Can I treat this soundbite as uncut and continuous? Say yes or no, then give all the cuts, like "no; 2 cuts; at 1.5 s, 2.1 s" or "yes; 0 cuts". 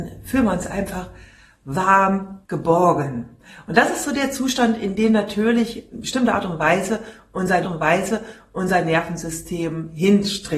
no; 3 cuts; at 2.4 s, 5.9 s, 7.6 s